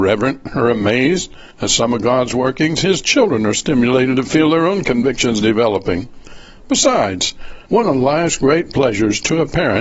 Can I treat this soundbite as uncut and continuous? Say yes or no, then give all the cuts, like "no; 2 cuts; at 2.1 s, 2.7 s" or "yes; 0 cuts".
no; 2 cuts; at 1.5 s, 7.7 s